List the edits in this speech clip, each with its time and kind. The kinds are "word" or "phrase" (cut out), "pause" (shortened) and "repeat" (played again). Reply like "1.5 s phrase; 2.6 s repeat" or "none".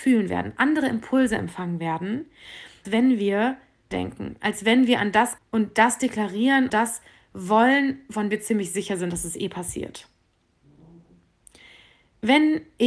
2.8 s word; 3.9 s word; 5.4 s word; 6.7 s word; 8.3 s word

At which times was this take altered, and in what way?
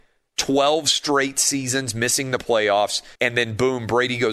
3.1 s pause

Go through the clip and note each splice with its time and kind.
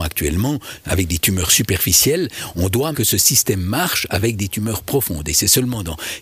2.9 s phrase

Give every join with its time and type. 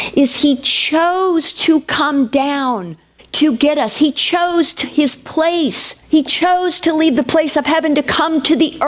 3.2 s pause; 4.8 s word; 6.0 s pause

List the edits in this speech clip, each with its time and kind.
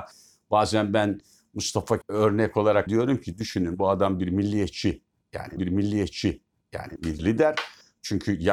2.0 s word; 2.9 s word; 5.6 s repeat

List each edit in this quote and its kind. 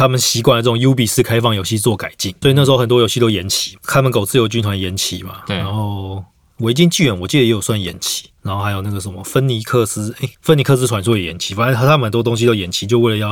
2.4 s word; 8.3 s pause; 10.3 s pause

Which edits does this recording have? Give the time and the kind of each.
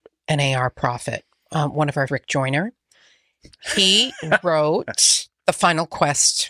2.1 s word

